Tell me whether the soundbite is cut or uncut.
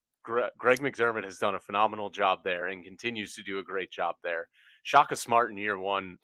uncut